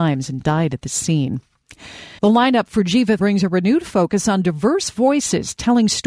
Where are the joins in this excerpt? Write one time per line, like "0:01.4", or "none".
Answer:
0:02.2
0:03.2